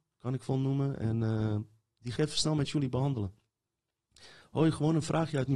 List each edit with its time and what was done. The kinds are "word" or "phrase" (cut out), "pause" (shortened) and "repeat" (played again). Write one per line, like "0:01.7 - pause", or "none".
0:02.2 - word